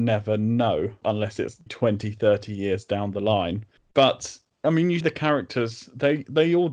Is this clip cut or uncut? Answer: cut